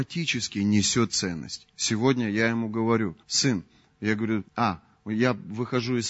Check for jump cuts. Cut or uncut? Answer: cut